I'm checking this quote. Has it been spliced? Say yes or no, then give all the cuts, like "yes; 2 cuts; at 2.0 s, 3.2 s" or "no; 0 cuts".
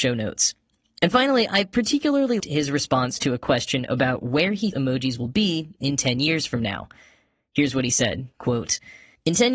yes; 3 cuts; at 2.4 s, 4.7 s, 8.3 s